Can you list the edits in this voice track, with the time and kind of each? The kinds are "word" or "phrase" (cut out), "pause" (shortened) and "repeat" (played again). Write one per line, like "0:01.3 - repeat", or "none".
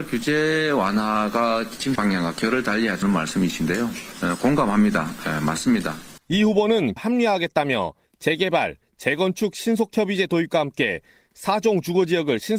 0:02.0 - phrase
0:03.0 - word
0:06.2 - pause
0:07.0 - word

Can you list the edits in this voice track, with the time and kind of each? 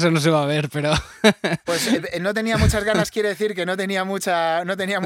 none

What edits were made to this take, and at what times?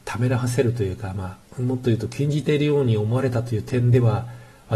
0:01.5 - pause

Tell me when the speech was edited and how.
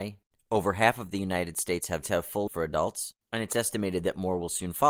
0:02.0 - phrase
0:02.5 - word

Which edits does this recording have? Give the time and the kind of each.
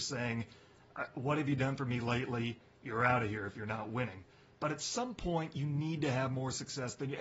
none

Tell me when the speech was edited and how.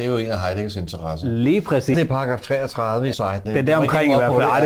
0:01.9 - word
0:03.1 - word
0:03.5 - word

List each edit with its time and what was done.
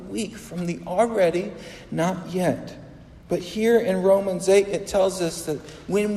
0:03.2 - pause

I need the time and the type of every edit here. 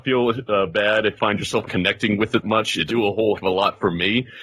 0:01.2 - word
0:01.7 - word
0:02.4 - word
0:02.9 - word
0:03.4 - word

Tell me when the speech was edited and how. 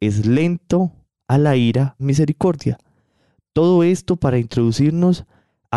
0:02.0 - phrase

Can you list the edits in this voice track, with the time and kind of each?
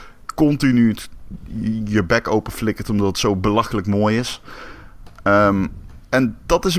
none

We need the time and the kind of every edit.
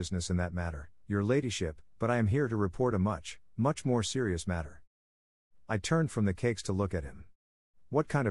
none

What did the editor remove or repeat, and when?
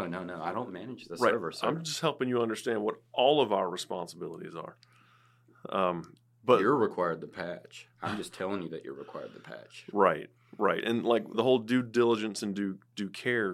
0:11.3 - word

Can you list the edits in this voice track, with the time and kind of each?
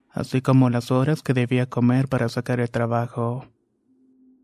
none

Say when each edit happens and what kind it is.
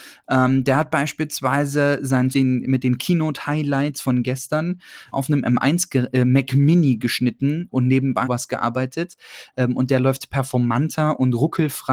0:02.3 - word
0:05.1 - word
0:07.7 - word
0:08.2 - word

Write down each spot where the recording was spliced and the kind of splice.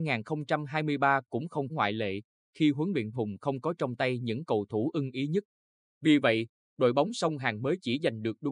0:01.7 - word
0:03.1 - phrase

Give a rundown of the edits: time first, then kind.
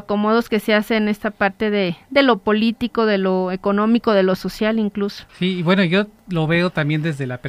0:05.3 - pause

